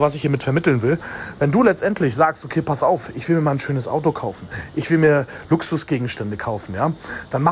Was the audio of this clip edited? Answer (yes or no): no